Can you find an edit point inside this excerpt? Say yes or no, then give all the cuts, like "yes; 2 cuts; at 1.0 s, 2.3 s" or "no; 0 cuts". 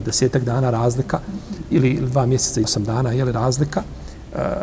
yes; 2 cuts; at 1.7 s, 2.6 s